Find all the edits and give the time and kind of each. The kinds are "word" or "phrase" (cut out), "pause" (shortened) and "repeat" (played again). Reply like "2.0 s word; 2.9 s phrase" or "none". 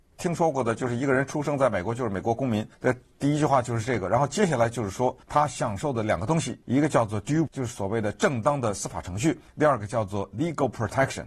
2.7 s pause; 3.1 s pause; 5.2 s pause; 6.6 s pause; 7.5 s word; 9.5 s pause